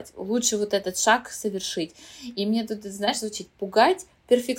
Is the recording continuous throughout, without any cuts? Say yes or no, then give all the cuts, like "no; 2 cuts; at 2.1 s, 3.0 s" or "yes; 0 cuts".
yes; 0 cuts